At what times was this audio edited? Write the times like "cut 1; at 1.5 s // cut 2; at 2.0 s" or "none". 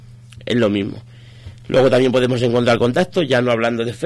none